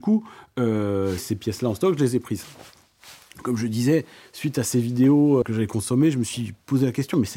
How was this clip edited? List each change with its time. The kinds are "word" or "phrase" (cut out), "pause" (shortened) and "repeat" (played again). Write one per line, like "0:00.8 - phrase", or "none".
0:01.2 - word
0:05.4 - word